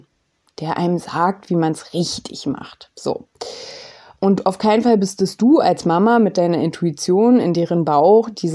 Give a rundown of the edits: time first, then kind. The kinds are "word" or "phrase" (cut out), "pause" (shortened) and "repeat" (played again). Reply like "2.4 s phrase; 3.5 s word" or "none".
none